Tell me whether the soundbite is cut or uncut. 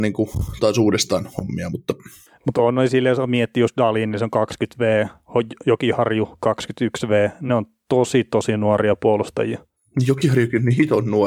uncut